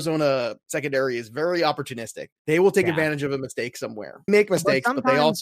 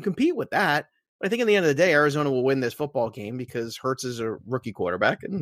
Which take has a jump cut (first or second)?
first